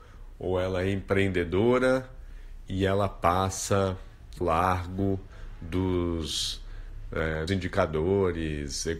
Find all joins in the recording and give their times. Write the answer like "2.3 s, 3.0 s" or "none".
2.7 s, 4.4 s, 7.5 s